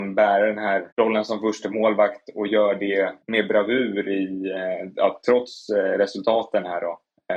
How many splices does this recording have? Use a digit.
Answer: 2